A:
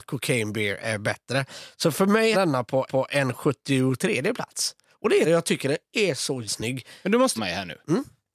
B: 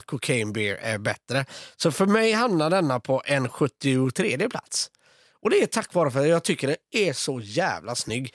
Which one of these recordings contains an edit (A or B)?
A